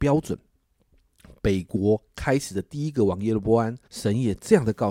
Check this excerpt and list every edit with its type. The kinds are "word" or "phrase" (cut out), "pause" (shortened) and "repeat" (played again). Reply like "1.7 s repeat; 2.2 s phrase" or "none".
3.9 s pause